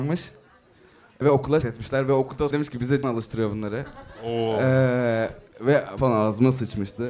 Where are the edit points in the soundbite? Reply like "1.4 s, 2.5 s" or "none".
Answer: 1.2 s, 1.6 s, 2.5 s, 3.0 s, 6.0 s